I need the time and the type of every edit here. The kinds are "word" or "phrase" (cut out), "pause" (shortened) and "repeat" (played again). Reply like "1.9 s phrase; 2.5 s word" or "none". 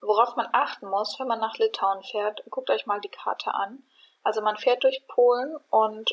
none